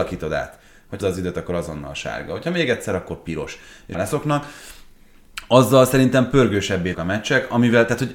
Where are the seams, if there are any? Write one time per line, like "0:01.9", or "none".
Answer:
0:01.0
0:03.9
0:06.9